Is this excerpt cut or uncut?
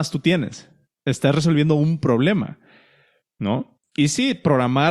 uncut